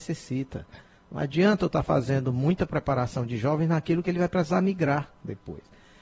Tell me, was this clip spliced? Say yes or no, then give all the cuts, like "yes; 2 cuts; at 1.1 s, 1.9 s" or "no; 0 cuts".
no; 0 cuts